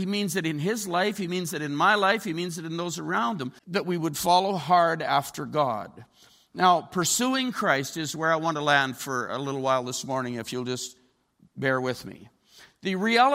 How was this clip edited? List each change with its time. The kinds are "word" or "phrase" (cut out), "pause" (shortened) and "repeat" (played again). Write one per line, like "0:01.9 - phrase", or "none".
0:03.6 - pause